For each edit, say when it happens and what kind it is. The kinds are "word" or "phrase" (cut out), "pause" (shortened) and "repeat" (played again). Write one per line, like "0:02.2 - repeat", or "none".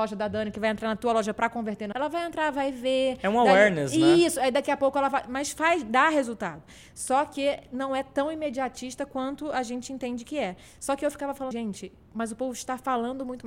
0:01.9 - word
0:11.5 - word